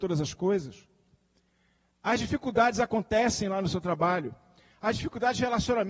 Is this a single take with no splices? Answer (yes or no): yes